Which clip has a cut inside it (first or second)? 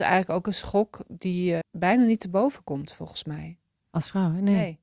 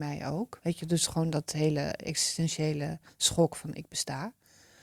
first